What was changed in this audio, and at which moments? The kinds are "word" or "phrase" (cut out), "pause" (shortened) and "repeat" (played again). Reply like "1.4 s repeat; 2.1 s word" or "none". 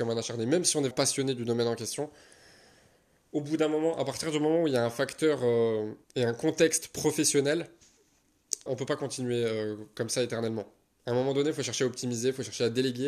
0.9 s word; 6.0 s pause; 8.7 s word